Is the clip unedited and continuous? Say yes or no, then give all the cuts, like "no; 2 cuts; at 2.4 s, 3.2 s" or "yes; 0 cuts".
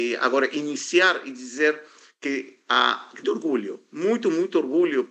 no; 1 cut; at 3.2 s